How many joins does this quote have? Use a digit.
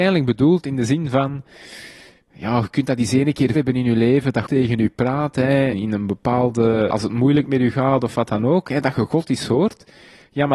4